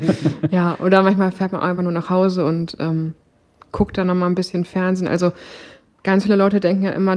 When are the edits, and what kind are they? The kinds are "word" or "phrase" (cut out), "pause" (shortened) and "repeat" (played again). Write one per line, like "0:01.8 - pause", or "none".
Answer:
none